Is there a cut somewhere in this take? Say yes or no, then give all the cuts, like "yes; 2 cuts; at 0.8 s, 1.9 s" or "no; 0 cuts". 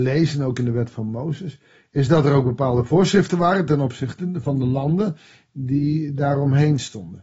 no; 0 cuts